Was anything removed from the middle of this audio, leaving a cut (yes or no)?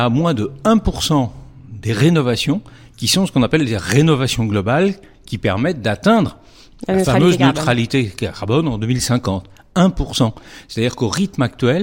no